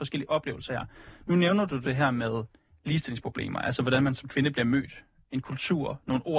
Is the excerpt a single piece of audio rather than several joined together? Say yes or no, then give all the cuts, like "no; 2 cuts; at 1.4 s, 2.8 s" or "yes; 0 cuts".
yes; 0 cuts